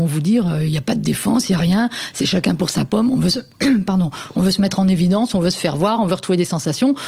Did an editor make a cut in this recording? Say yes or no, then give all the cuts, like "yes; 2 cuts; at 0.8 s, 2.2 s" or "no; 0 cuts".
no; 0 cuts